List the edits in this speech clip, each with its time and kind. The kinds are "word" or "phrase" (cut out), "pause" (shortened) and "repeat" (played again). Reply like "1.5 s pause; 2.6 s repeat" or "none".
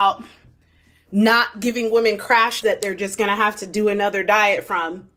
2.6 s word